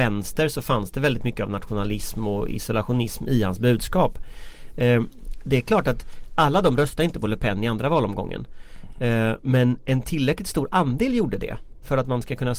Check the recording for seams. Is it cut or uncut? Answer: uncut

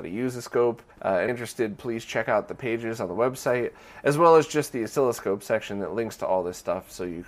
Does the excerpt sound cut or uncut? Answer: cut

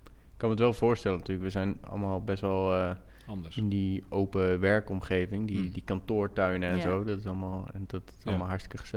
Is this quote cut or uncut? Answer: cut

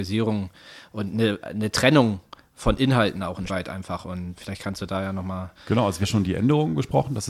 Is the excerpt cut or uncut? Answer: cut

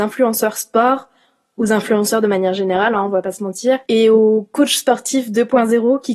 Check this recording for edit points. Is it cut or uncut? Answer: cut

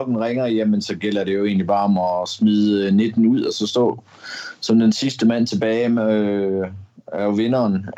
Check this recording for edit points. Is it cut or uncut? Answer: uncut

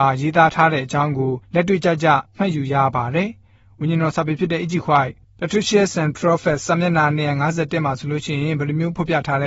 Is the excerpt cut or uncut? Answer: cut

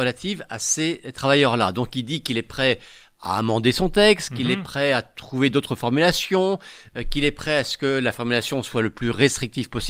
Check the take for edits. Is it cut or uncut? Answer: uncut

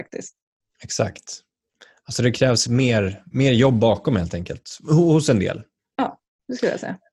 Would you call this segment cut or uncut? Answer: uncut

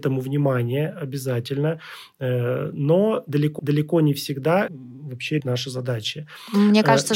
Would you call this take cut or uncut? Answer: cut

